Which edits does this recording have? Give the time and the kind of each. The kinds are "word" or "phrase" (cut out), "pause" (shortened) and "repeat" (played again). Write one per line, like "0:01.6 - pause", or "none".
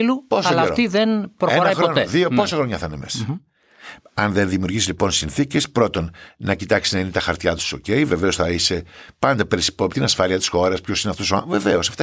0:09.9 - word